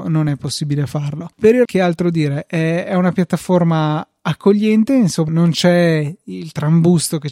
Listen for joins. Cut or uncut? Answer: cut